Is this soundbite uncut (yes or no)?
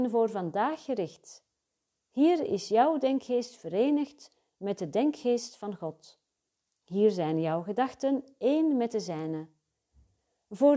yes